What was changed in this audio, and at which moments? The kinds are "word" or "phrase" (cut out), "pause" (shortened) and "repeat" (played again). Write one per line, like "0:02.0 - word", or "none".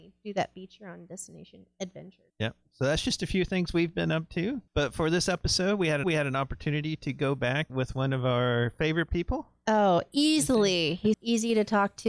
0:02.3 - pause
0:04.7 - pause
0:06.0 - repeat
0:07.7 - phrase
0:11.1 - word